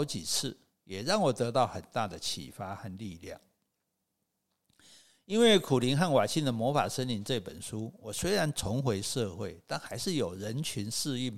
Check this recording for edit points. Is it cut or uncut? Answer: uncut